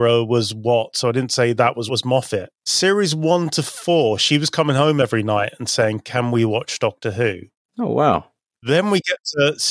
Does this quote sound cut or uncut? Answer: cut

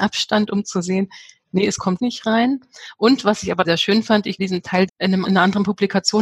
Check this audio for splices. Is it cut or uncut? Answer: cut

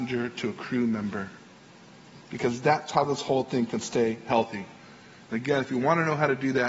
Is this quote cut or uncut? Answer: uncut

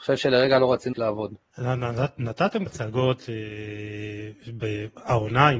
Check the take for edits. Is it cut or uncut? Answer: cut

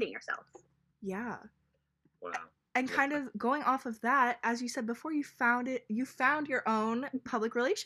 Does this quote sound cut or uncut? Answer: uncut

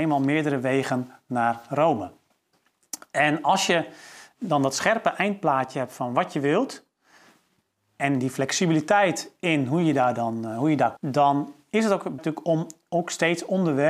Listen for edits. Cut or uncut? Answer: cut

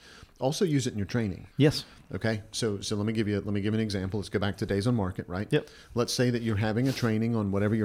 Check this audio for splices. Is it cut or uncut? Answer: cut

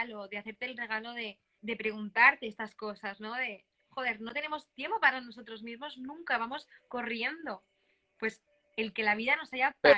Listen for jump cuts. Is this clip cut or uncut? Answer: cut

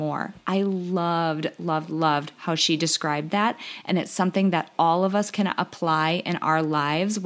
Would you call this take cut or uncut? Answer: uncut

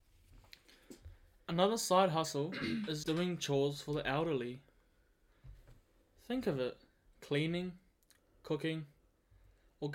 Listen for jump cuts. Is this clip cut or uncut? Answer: cut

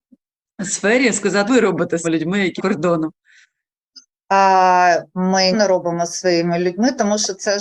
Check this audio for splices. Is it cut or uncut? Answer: cut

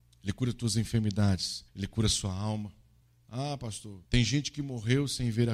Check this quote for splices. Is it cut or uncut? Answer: cut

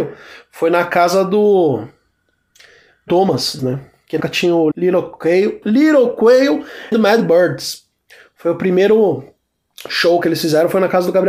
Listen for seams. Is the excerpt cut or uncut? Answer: cut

